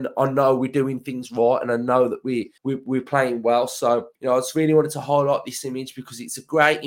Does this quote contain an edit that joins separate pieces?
yes; 2 cuts; at 2.6 s, 4.1 s

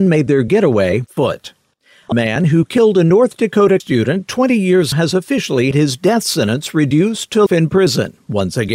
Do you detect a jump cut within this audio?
yes; 6 cuts; at 1.1 s, 2.1 s, 3.8 s, 4.9 s, 5.7 s, 7.5 s

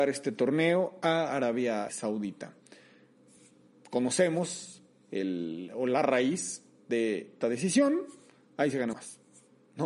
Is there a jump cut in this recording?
yes; 3 cuts; at 1.9 s, 7.4 s, 8.9 s

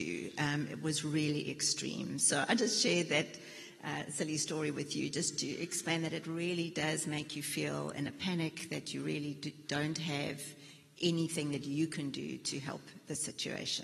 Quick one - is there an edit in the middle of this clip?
no; 0 cuts

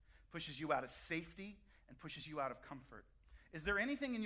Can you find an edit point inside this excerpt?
no; 0 cuts

